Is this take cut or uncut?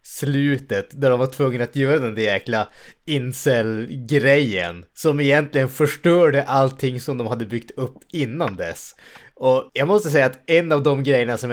cut